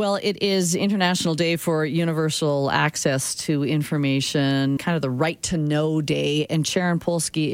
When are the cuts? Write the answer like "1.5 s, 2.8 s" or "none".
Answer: 4.8 s